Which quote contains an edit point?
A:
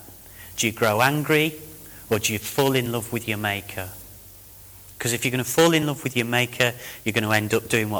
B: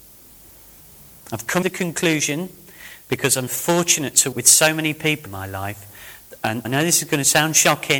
B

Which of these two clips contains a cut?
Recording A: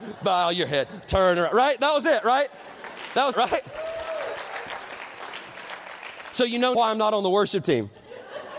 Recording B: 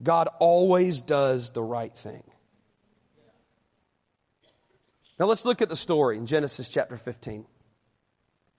A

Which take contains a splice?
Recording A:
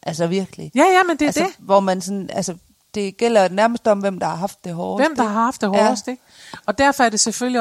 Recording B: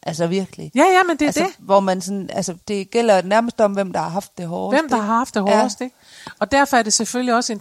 B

